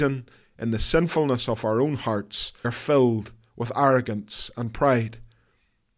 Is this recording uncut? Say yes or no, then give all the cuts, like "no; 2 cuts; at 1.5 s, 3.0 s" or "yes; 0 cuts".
no; 1 cut; at 2.6 s